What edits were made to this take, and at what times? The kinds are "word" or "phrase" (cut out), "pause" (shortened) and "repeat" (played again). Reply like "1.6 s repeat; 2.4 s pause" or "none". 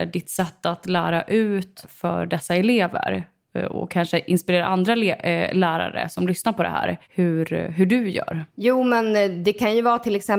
7.0 s pause; 8.5 s pause